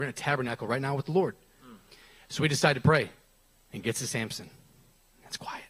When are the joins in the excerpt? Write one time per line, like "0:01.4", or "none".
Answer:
none